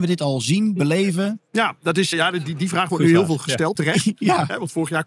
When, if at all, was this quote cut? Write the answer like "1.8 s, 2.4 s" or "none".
2.1 s, 3.8 s